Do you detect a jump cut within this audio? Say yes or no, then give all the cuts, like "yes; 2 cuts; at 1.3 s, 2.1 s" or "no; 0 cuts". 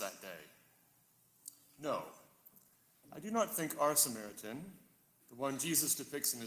no; 0 cuts